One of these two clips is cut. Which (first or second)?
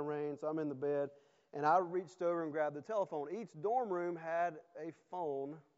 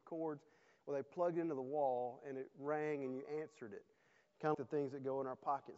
second